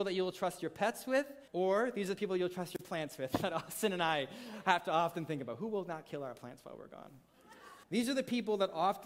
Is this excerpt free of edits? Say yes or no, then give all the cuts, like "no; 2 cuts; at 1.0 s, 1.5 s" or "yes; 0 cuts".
no; 2 cuts; at 1.5 s, 7.8 s